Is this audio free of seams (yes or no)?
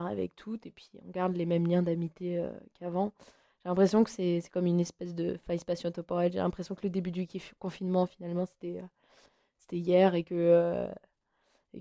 yes